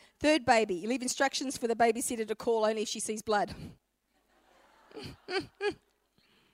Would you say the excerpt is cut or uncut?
uncut